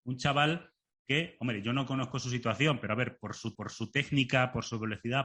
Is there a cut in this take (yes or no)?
yes